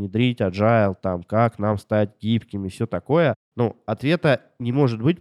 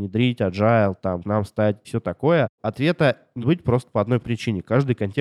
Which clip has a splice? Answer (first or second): second